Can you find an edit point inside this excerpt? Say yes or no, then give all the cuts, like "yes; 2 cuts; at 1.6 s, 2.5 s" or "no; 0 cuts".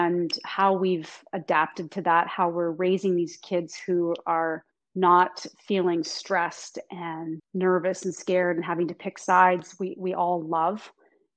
yes; 2 cuts; at 4.7 s, 7.4 s